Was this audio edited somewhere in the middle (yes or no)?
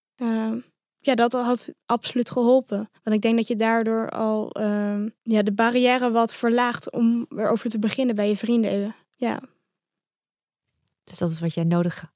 yes